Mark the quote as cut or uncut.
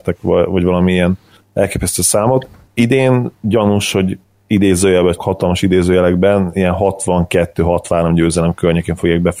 cut